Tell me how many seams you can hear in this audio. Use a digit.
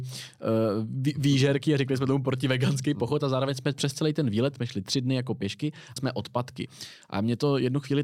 1